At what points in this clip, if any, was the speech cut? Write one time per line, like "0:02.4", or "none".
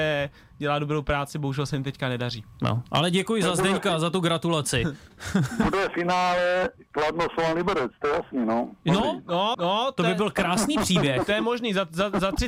0:09.5